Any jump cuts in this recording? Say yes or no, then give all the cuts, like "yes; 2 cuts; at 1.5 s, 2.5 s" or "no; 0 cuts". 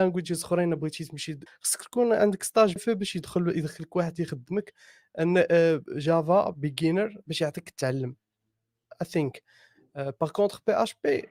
yes; 2 cuts; at 1.5 s, 2.8 s